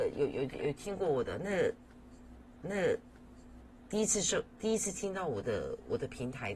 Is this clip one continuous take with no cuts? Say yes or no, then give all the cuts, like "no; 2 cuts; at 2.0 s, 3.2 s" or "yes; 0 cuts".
no; 1 cut; at 2.6 s